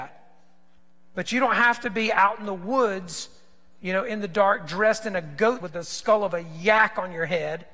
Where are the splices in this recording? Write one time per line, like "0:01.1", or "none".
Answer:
0:05.6